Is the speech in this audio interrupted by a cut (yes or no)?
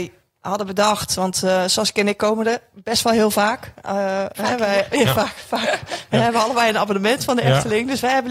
no